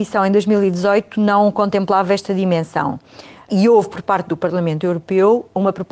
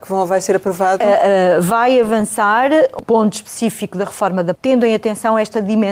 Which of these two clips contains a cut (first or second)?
second